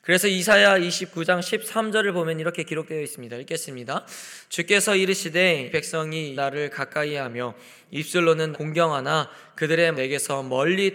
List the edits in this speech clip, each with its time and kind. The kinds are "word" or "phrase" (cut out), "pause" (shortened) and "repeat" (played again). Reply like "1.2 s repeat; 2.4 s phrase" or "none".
5.7 s word; 6.4 s word; 8.5 s word; 9.9 s word